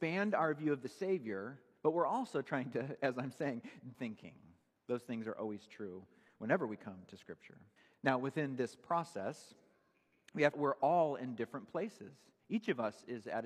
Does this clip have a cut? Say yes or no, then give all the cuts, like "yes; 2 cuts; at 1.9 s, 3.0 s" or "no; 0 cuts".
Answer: yes; 3 cuts; at 3.9 s, 7.8 s, 10.5 s